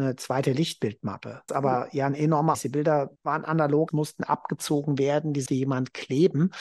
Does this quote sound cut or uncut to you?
cut